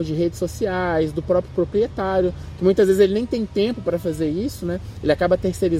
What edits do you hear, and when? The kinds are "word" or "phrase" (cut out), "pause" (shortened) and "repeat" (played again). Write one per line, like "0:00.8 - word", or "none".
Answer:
none